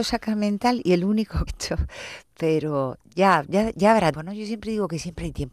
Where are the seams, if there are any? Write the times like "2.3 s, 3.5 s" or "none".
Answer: 1.5 s, 3.1 s, 4.1 s